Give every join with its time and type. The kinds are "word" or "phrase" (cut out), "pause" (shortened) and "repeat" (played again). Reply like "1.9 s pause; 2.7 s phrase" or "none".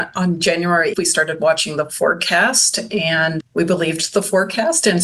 0.9 s word; 3.4 s word